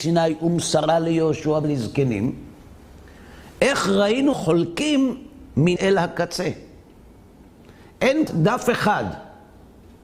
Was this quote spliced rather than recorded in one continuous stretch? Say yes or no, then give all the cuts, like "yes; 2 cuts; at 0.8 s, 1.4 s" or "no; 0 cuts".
yes; 4 cuts; at 1.6 s, 4.3 s, 5.8 s, 8.3 s